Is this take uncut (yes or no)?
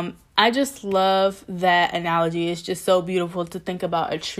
yes